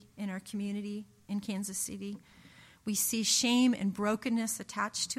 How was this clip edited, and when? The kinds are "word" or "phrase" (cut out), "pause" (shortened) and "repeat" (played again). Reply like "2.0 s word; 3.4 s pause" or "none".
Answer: none